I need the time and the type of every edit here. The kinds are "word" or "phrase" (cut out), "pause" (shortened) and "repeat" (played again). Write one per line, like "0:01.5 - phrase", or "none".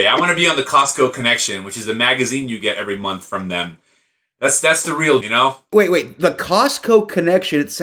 0:05.2 - word